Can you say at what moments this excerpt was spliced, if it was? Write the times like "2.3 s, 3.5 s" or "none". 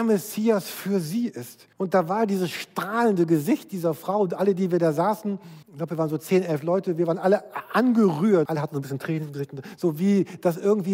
1.7 s, 5.6 s, 8.5 s